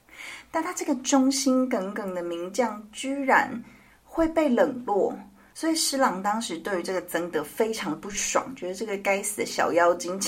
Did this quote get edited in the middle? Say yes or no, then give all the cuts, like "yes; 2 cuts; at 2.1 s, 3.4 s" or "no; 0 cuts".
no; 0 cuts